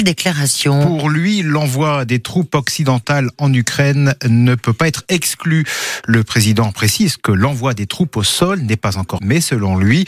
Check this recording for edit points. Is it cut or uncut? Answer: cut